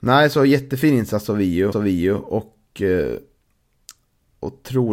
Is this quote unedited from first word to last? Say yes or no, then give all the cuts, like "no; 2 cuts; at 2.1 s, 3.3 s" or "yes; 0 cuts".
no; 1 cut; at 1.7 s